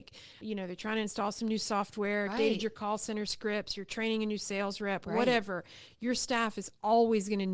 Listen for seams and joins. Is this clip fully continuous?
no; 1 cut; at 2.3 s

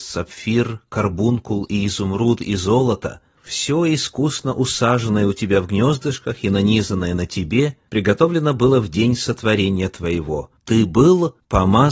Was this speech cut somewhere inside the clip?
no; 0 cuts

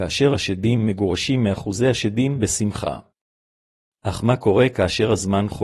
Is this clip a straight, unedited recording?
no; 1 cut; at 2.4 s

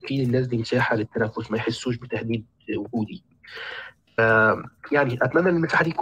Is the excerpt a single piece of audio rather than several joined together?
yes; 0 cuts

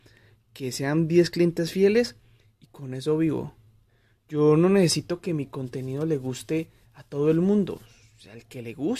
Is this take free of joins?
yes; 0 cuts

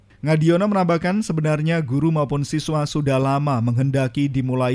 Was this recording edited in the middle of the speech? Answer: no; 0 cuts

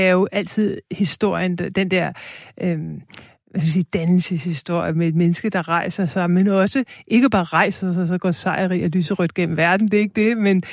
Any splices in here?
no; 0 cuts

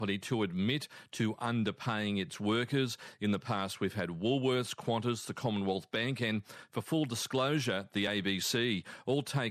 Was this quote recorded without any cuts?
yes; 0 cuts

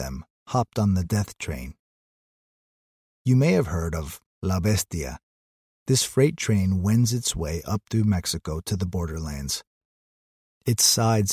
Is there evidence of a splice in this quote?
no; 0 cuts

